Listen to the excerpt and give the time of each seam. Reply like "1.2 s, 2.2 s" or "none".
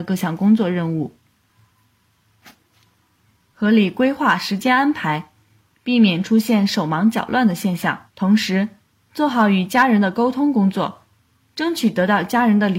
8.1 s